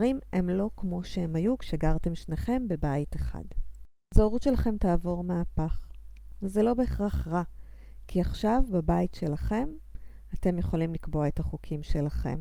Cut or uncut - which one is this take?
uncut